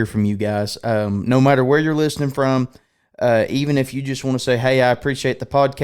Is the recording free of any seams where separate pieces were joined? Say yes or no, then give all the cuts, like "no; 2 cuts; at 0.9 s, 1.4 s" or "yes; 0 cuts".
yes; 0 cuts